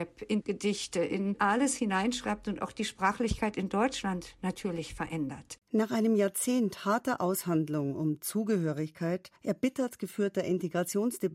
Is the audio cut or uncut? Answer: cut